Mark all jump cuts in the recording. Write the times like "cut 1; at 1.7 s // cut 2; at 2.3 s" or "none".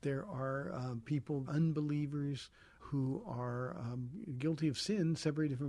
cut 1; at 1.5 s // cut 2; at 2.8 s